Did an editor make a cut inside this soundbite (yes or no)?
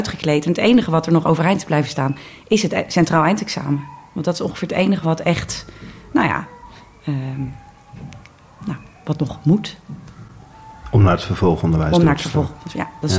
no